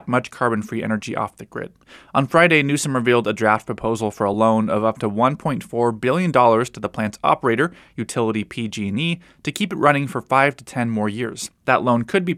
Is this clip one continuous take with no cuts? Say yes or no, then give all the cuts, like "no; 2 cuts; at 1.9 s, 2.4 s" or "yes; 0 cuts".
yes; 0 cuts